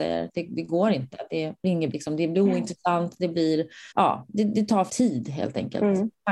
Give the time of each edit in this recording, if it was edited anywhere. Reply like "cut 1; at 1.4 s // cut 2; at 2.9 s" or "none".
cut 1; at 1.9 s // cut 2; at 3.9 s // cut 3; at 4.9 s